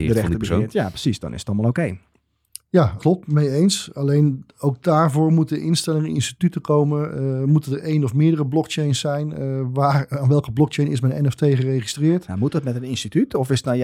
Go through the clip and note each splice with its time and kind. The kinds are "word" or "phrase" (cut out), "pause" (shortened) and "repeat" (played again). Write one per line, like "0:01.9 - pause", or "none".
0:03.0 - phrase